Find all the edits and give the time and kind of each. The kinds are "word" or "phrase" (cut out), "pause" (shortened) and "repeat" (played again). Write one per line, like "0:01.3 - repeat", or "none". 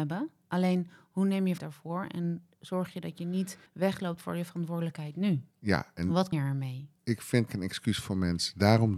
0:01.6 - word
0:03.7 - pause
0:05.5 - pause
0:06.3 - word
0:07.0 - pause
0:07.5 - phrase